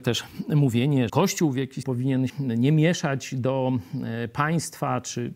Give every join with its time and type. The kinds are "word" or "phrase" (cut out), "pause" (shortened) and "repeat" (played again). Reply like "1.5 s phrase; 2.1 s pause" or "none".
1.1 s word; 1.8 s word; 2.3 s word